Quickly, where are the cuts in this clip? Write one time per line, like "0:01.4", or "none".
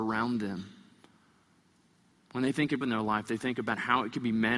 0:02.8